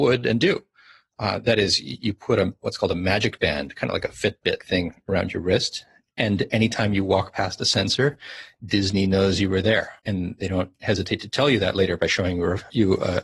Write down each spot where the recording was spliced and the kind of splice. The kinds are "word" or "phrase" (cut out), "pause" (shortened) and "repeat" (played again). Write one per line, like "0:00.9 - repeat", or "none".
0:04.6 - word
0:10.0 - pause